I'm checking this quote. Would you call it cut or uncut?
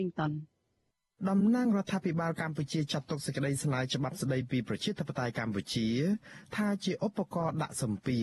uncut